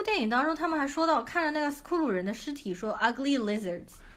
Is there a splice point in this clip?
no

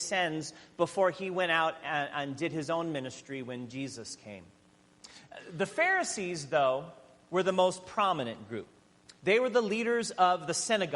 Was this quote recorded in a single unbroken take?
yes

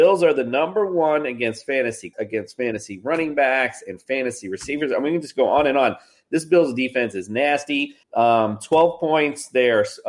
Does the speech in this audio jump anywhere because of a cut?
yes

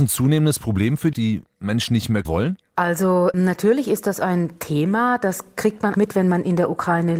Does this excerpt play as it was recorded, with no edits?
no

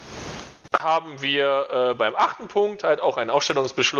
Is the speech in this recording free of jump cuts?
yes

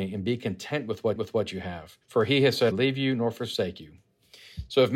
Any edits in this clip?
yes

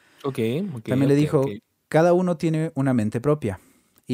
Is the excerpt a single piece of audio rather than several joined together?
yes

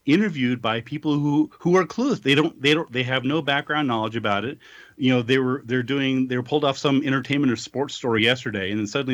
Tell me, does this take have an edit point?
no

